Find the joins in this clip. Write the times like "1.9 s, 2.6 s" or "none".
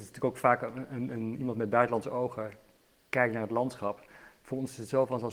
none

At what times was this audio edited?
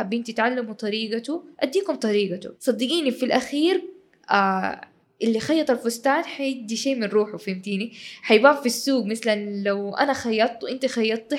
1.5 s, 2.5 s, 5.0 s

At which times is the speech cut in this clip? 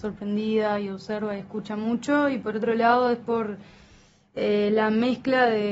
none

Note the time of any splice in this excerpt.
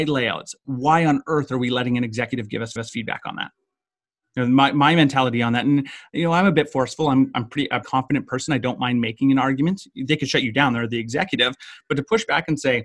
2.8 s, 7.8 s

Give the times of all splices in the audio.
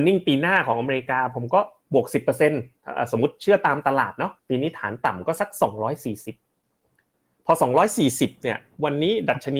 4.4 s

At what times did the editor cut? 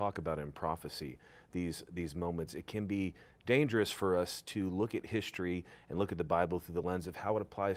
none

